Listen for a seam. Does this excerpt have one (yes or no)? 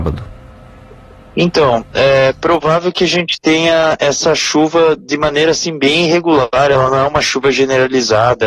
yes